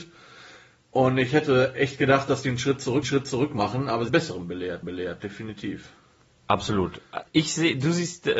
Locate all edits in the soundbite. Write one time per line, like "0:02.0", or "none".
0:03.0
0:04.1
0:04.8
0:07.3